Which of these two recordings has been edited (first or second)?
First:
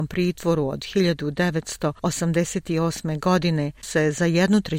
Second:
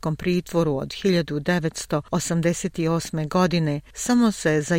first